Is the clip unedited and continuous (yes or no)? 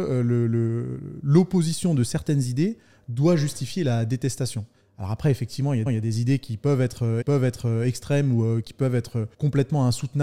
no